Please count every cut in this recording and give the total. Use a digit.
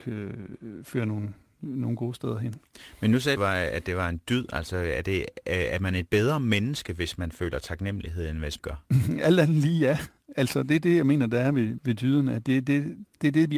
3